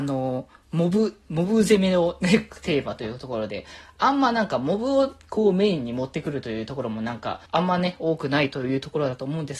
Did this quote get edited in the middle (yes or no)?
yes